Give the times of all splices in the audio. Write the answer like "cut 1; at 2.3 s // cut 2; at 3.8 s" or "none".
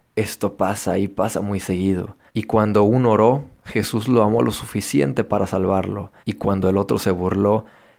cut 1; at 2.3 s // cut 2; at 6.2 s